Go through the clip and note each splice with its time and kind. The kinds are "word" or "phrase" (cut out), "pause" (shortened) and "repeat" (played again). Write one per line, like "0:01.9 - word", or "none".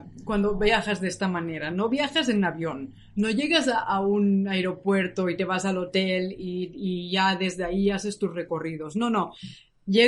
none